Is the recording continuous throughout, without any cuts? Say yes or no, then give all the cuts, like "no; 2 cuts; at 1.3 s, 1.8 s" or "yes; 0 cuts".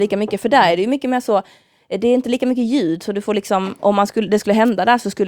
yes; 0 cuts